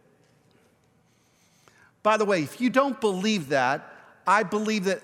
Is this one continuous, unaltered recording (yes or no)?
yes